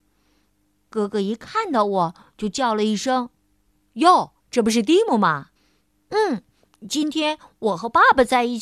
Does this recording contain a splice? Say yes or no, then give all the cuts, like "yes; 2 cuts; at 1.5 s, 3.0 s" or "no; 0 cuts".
yes; 3 cuts; at 3.4 s, 4.4 s, 5.6 s